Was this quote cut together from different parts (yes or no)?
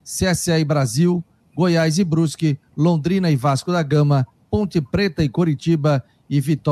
no